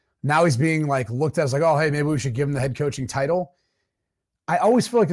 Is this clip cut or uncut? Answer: uncut